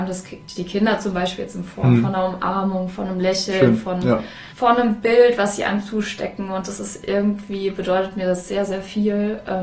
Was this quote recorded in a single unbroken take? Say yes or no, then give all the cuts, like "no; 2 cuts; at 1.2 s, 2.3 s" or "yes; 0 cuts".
no; 1 cut; at 4.5 s